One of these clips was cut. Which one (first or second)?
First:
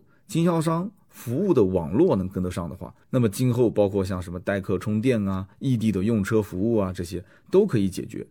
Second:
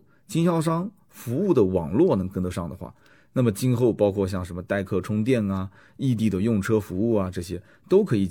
first